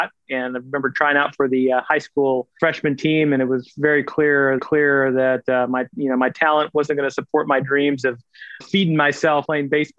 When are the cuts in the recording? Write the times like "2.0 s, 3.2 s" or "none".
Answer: 4.6 s, 8.6 s